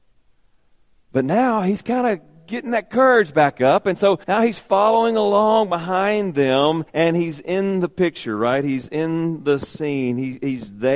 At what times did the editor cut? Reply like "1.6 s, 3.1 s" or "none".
4.2 s, 6.9 s